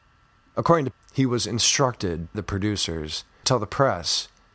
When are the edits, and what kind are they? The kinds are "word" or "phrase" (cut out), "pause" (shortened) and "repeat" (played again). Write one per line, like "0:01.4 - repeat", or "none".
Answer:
0:00.9 - word
0:02.3 - word
0:03.4 - word